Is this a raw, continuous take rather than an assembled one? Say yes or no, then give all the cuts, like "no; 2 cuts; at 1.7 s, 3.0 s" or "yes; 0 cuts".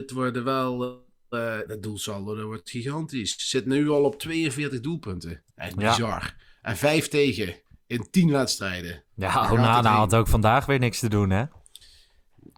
no; 3 cuts; at 1.7 s, 5.5 s, 9.1 s